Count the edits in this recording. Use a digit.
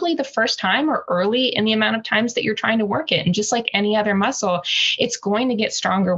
0